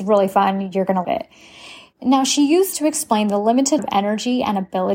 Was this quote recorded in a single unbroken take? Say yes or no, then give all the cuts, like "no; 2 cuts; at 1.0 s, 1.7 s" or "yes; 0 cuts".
no; 3 cuts; at 1.0 s, 2.7 s, 3.8 s